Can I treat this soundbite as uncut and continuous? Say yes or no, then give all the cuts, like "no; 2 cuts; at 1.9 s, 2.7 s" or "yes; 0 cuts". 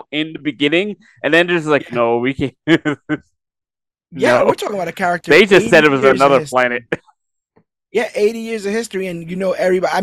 yes; 0 cuts